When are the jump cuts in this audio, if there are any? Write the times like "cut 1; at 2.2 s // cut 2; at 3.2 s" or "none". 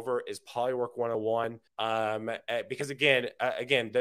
cut 1; at 1.7 s